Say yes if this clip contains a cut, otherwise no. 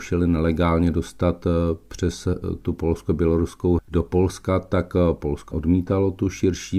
yes